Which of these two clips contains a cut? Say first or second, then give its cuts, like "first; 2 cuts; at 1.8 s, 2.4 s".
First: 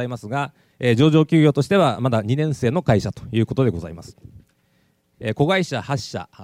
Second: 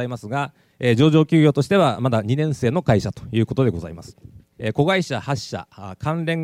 second; 1 cut; at 4.5 s